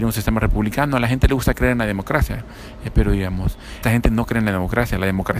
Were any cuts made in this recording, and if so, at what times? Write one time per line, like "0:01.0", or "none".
0:03.8